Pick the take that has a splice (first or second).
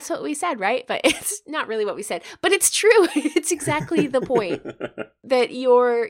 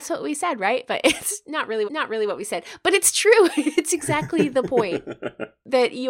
second